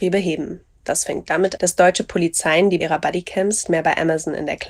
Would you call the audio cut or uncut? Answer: cut